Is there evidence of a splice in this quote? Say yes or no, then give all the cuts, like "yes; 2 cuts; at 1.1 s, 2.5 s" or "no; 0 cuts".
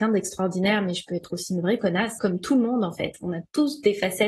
yes; 1 cut; at 2.2 s